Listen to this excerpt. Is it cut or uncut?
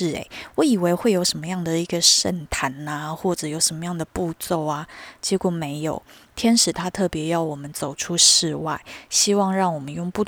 uncut